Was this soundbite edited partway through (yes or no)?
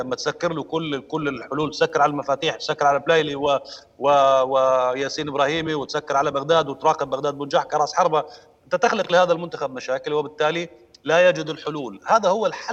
no